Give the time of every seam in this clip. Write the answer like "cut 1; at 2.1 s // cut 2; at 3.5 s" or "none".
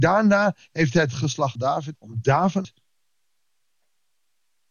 cut 1; at 1.6 s // cut 2; at 2.0 s // cut 3; at 2.6 s